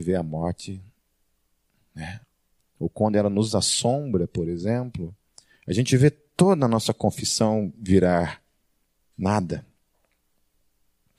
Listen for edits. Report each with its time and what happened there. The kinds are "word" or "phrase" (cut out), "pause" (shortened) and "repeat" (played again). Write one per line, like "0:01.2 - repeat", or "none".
none